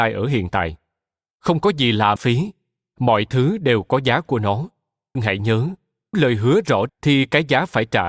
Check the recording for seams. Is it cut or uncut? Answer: cut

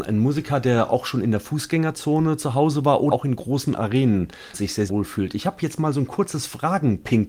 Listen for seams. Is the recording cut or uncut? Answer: cut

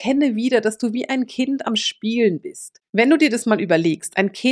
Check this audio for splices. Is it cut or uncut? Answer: cut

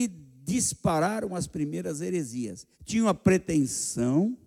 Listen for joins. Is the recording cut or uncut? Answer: cut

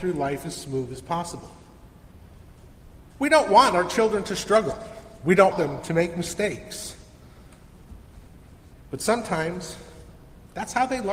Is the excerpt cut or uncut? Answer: cut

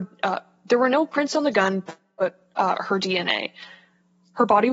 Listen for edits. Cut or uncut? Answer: uncut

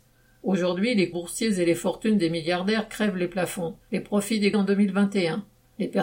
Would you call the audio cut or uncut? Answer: cut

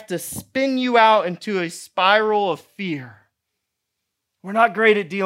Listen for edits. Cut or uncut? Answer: uncut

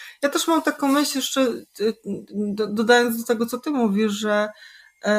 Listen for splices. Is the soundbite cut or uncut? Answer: uncut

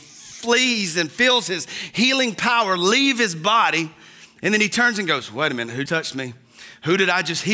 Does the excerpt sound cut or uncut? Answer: cut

